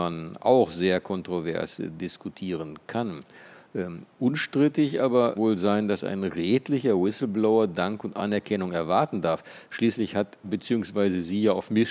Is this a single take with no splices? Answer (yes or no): no